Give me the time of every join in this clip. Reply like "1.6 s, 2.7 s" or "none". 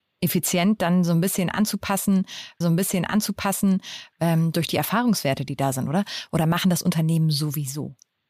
2.6 s